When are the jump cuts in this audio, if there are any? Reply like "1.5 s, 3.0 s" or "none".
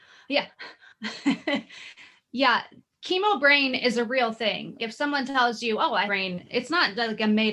4.8 s, 6.1 s